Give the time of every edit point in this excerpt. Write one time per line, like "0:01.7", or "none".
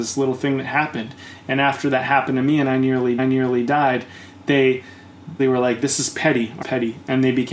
0:03.2
0:05.4
0:06.6